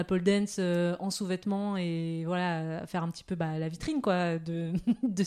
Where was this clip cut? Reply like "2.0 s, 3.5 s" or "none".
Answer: none